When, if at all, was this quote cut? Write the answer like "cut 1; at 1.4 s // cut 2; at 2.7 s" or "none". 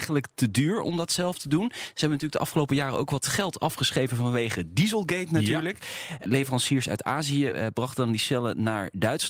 none